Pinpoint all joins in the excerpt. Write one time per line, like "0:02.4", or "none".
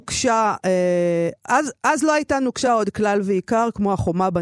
none